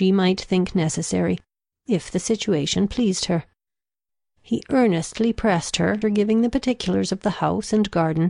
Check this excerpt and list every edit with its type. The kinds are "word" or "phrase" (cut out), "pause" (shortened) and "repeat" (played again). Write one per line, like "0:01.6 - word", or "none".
0:06.0 - word